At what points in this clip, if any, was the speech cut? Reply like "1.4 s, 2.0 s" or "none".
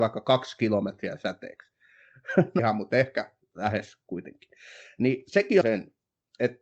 2.6 s, 5.6 s